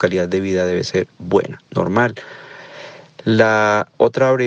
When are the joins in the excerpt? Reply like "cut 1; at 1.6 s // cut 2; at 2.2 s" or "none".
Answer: cut 1; at 1.6 s